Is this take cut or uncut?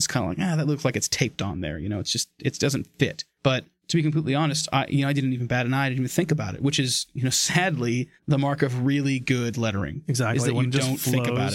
uncut